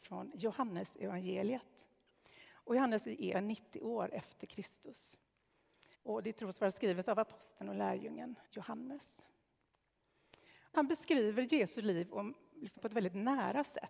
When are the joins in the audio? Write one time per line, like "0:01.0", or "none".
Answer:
0:03.0
0:03.3
0:05.9
0:08.4
0:10.7
0:12.8